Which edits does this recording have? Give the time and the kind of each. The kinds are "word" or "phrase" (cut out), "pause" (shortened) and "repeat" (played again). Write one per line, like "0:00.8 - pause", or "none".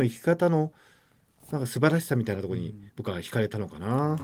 0:02.9 - pause